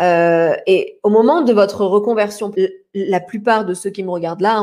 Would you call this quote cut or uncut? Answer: cut